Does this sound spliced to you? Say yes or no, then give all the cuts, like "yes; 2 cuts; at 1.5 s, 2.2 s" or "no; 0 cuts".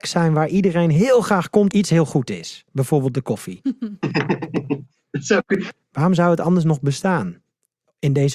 yes; 1 cut; at 1.7 s